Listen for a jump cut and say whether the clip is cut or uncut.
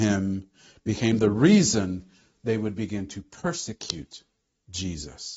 uncut